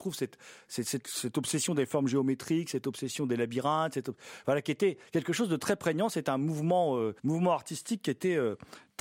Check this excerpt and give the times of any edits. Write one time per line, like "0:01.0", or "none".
0:07.2